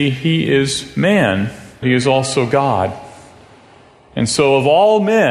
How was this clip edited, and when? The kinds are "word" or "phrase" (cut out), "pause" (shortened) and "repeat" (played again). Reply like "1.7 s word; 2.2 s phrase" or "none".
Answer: 1.8 s word